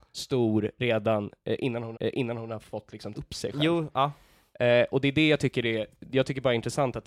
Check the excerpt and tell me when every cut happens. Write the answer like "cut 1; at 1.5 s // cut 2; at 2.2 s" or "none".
cut 1; at 1.9 s // cut 2; at 3.1 s